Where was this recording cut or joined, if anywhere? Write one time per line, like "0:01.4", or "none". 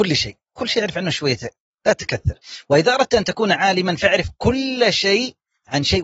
none